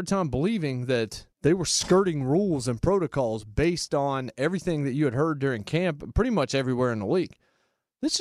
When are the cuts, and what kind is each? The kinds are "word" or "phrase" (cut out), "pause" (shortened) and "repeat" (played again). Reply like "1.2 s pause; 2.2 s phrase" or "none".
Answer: 1.3 s pause